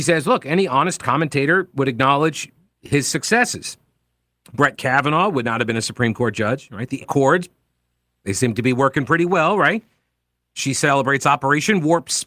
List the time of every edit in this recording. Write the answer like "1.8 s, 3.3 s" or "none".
7.0 s